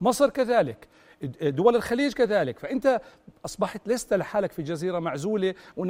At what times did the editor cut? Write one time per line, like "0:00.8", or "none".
none